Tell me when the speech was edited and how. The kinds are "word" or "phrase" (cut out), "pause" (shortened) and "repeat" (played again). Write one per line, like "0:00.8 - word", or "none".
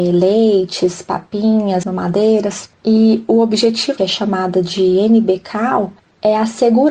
0:01.8 - word
0:02.7 - pause
0:04.0 - phrase